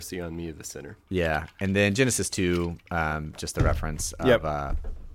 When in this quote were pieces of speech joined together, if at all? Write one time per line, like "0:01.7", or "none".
0:01.0